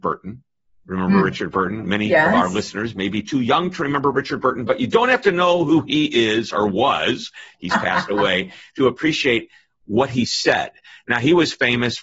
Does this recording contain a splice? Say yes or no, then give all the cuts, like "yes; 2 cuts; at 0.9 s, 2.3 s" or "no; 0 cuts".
no; 0 cuts